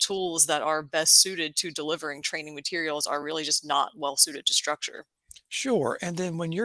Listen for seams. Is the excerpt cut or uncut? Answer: uncut